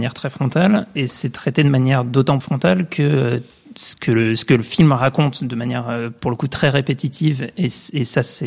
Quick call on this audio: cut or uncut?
cut